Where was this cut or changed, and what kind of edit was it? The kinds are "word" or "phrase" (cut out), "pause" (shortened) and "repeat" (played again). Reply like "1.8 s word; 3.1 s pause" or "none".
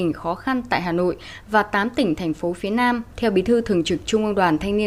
3.1 s pause